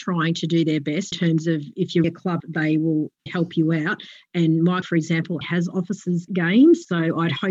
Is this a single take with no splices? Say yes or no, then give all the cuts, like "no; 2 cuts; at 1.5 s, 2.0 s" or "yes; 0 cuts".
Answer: no; 7 cuts; at 1.1 s, 2.0 s, 2.4 s, 3.3 s, 4.8 s, 5.4 s, 6.3 s